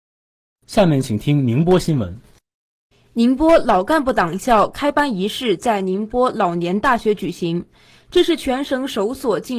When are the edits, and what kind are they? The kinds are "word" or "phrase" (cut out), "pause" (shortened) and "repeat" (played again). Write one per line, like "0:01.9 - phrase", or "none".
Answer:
0:02.9 - pause